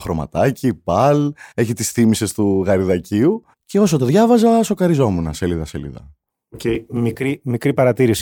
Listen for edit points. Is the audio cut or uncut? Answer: cut